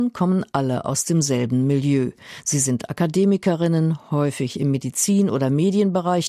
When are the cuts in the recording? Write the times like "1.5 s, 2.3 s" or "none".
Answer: none